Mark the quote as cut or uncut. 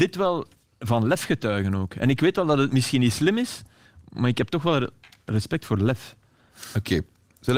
uncut